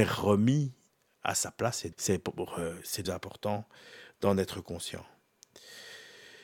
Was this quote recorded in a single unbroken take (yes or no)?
no